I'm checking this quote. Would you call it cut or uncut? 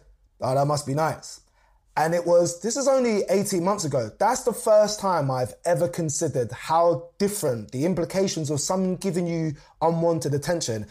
uncut